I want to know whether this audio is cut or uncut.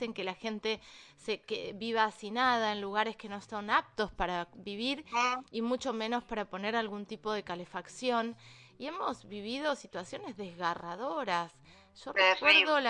uncut